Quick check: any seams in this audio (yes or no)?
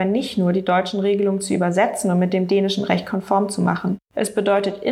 no